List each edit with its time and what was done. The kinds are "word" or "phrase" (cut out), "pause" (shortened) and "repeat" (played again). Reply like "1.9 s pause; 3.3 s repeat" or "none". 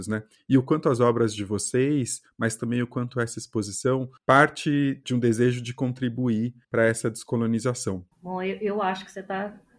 4.2 s pause; 6.6 s pause; 8.1 s pause